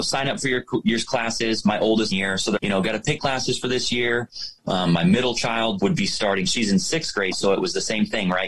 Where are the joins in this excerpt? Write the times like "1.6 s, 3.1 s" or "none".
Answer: 2.1 s, 2.6 s, 3.2 s, 5.8 s, 7.3 s